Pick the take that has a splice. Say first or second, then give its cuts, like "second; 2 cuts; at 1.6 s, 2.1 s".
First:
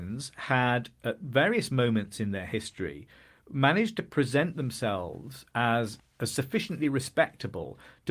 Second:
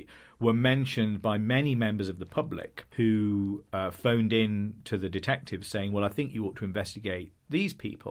second; 1 cut; at 2.9 s